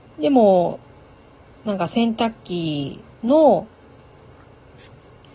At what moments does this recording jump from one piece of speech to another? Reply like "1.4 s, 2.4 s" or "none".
none